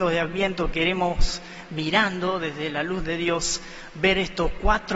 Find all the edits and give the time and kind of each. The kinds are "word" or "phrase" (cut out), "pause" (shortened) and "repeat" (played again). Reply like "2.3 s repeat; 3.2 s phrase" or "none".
none